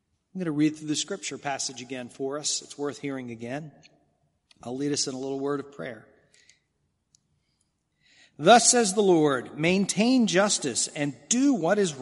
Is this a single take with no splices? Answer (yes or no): yes